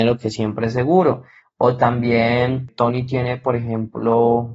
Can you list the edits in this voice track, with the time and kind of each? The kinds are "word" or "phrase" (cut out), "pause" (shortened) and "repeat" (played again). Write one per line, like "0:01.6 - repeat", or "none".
none